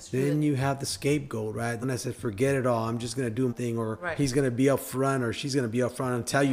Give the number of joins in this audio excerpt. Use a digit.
2